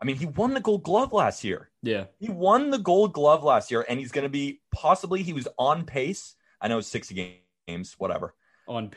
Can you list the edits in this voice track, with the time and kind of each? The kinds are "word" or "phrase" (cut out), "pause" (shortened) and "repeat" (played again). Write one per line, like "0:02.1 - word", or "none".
none